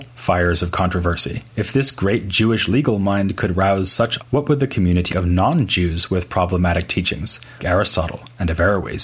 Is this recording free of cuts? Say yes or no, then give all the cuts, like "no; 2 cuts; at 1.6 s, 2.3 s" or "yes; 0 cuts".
no; 4 cuts; at 1.5 s, 4.2 s, 5.1 s, 7.6 s